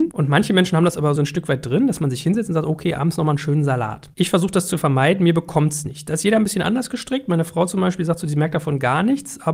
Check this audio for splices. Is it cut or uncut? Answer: cut